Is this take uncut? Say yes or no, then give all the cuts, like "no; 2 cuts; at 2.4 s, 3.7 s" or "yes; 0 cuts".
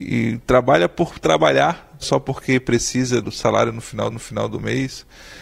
no; 3 cuts; at 2.0 s, 3.2 s, 4.1 s